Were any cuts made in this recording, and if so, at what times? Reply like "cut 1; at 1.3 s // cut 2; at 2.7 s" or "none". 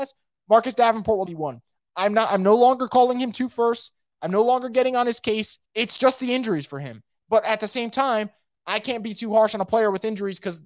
cut 1; at 1.3 s // cut 2; at 5.6 s